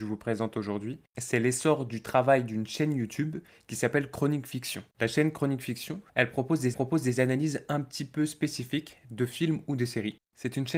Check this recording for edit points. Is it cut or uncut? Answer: cut